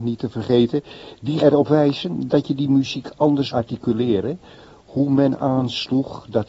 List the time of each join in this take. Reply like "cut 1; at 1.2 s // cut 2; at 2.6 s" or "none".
cut 1; at 1.4 s // cut 2; at 3.5 s